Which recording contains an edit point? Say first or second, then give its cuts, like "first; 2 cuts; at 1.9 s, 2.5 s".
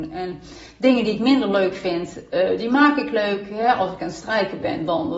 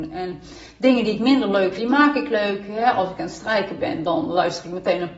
second; 1 cut; at 1.8 s